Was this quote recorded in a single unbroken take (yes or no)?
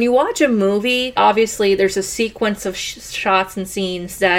yes